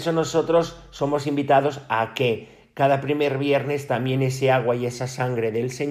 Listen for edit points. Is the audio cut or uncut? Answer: uncut